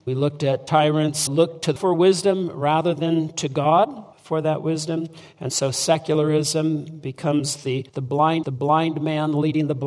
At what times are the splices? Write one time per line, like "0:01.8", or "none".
0:01.3
0:01.8
0:04.1
0:07.9
0:08.4

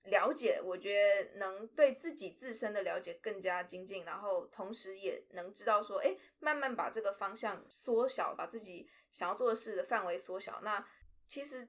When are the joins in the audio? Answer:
0:08.4

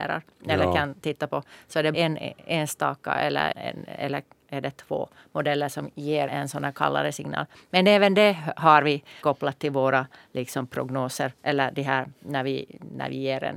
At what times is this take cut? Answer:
0:01.9
0:03.5
0:06.3
0:09.2

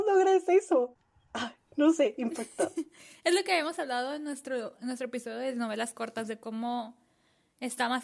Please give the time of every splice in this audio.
none

